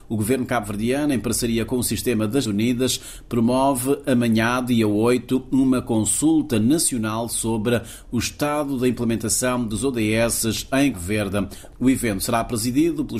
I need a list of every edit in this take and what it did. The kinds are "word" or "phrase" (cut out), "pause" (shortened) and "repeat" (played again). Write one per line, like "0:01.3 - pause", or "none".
0:02.5 - word
0:10.9 - word